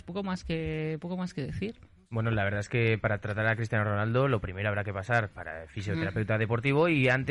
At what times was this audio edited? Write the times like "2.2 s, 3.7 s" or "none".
none